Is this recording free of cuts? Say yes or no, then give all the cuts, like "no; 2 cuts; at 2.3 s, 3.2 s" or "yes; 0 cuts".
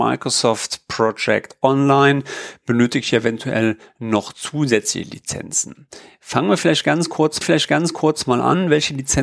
no; 1 cut; at 7.4 s